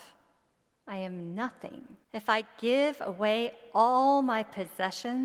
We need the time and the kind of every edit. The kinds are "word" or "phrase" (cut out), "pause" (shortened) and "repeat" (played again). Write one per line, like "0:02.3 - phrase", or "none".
0:02.0 - pause